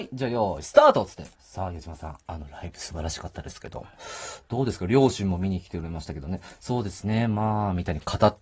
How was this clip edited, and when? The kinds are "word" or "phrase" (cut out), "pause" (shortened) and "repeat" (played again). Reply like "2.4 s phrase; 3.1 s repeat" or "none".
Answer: 1.3 s pause; 2.2 s pause